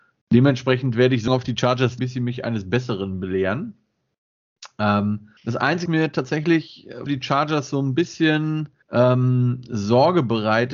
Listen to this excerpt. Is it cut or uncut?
cut